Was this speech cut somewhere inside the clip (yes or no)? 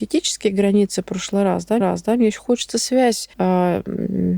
yes